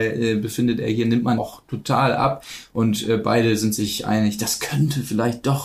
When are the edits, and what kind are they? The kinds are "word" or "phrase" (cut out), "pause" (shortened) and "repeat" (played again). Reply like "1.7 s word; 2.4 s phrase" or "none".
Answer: 1.4 s word